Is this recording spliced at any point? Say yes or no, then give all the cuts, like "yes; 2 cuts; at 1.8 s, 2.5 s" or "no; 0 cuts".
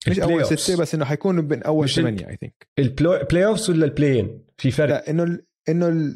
yes; 1 cut; at 4.9 s